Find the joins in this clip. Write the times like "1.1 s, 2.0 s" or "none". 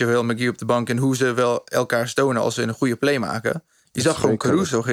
none